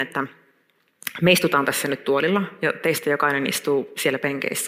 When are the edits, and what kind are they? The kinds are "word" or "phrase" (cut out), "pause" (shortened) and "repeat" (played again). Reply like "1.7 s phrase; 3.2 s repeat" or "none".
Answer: none